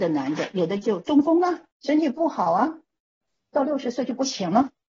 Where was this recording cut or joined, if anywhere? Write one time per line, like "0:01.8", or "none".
0:01.7